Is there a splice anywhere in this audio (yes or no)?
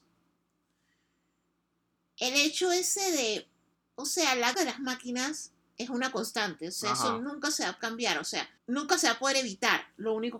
yes